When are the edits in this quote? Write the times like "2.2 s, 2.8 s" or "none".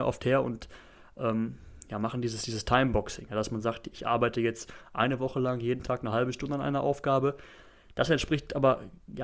none